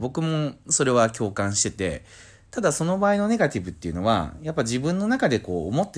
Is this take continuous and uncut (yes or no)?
yes